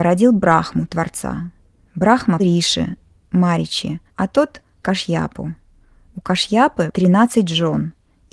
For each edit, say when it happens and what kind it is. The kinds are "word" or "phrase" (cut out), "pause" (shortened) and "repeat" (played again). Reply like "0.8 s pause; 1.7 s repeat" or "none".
2.4 s word; 4.1 s pause; 4.8 s word; 6.9 s word